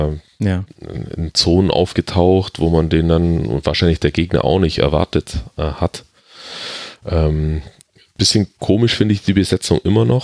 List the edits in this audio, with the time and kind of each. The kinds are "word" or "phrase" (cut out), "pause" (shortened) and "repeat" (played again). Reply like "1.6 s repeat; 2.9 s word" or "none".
none

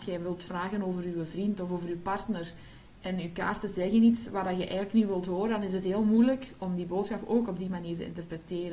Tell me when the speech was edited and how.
6.6 s word

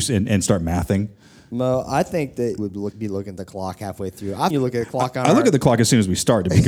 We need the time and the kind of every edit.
2.6 s word; 2.9 s word; 4.5 s word

